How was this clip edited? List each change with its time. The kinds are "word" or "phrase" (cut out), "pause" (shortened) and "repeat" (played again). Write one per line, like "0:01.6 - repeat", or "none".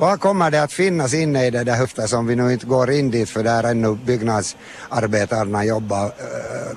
0:01.8 - word

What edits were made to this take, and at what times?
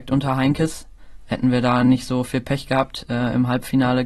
none

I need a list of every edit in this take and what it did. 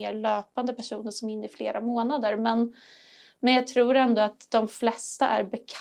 none

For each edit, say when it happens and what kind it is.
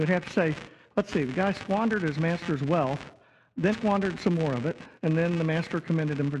0:03.7 - word
0:05.0 - pause

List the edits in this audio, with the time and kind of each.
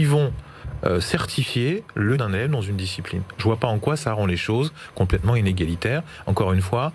0:02.1 - word

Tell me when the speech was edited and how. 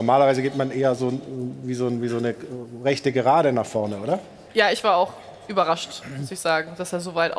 none

